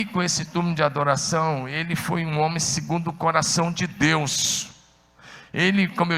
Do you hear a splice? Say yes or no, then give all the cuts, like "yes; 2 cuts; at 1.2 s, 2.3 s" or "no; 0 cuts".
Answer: no; 0 cuts